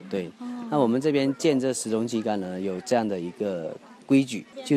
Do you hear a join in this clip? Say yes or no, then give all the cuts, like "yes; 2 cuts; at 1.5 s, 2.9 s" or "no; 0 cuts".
no; 0 cuts